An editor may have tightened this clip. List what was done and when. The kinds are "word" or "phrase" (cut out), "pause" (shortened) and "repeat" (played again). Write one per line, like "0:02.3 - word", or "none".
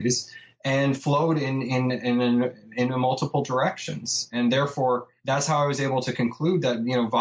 0:05.2 - pause